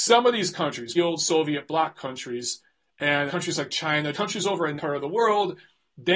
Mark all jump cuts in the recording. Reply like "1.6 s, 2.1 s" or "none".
0.9 s, 3.3 s, 4.1 s, 4.8 s